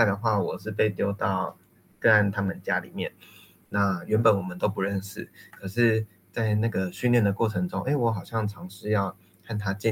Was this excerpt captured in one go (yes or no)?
yes